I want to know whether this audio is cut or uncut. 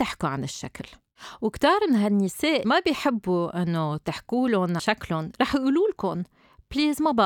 cut